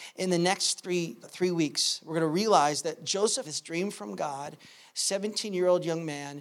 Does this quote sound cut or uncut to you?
cut